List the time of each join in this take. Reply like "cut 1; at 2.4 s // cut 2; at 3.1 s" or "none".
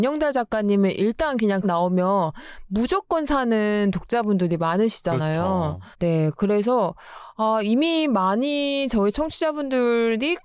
cut 1; at 1.6 s // cut 2; at 5.9 s